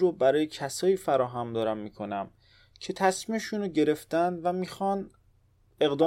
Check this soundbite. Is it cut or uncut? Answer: uncut